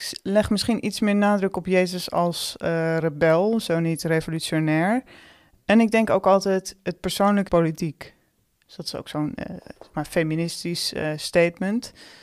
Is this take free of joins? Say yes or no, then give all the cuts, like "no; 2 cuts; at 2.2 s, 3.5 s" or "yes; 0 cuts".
no; 2 cuts; at 7.5 s, 9.9 s